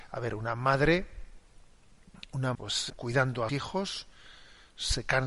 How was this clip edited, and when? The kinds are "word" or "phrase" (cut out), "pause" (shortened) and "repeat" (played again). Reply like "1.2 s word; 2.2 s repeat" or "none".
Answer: 2.5 s word; 2.9 s word; 3.5 s word